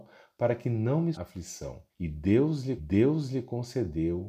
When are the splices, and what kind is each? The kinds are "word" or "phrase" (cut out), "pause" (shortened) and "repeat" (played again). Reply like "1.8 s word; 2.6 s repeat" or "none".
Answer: 1.1 s word; 1.9 s pause; 2.8 s repeat